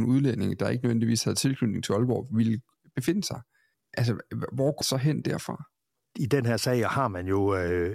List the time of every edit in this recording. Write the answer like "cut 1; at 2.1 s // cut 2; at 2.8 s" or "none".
cut 1; at 4.8 s